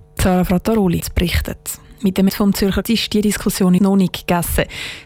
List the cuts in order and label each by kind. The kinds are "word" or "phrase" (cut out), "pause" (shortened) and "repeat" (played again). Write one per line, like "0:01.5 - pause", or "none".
0:01.0 - word
0:02.3 - word
0:02.8 - word
0:03.8 - word